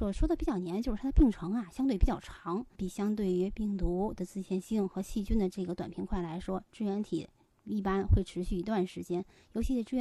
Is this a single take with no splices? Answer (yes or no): no